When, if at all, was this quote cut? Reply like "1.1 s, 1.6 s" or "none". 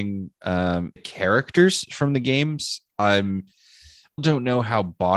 1.0 s, 4.2 s